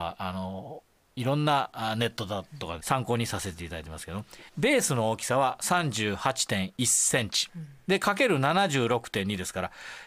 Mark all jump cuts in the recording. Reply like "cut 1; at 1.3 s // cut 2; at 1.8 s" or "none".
cut 1; at 2.8 s // cut 2; at 4.5 s // cut 3; at 6.8 s // cut 4; at 7.8 s